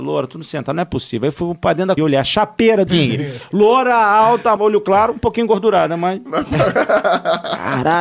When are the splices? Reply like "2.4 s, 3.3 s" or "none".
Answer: 2.0 s, 2.9 s, 4.6 s